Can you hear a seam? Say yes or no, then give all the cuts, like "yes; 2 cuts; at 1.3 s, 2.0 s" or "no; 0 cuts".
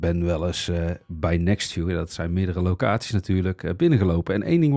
no; 0 cuts